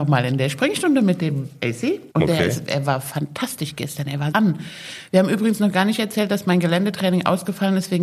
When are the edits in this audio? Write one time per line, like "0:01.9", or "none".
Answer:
0:02.1
0:04.3